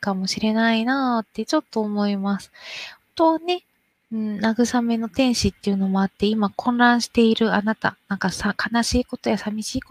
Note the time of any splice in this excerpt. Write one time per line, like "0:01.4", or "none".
0:03.9